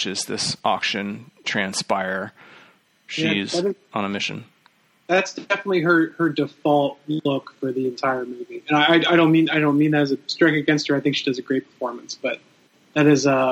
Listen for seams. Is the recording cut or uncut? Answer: uncut